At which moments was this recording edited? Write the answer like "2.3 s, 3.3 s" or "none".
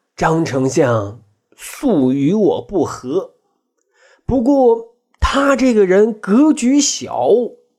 none